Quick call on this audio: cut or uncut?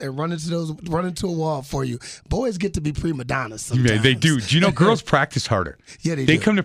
uncut